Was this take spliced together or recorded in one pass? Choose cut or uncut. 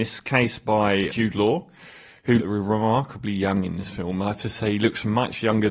cut